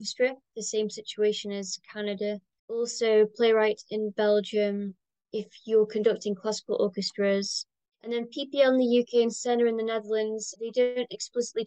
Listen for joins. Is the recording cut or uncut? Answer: uncut